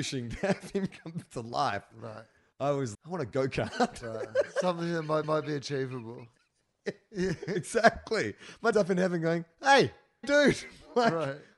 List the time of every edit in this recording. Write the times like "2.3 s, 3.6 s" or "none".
1.3 s, 2.9 s, 5.2 s, 8.7 s, 10.2 s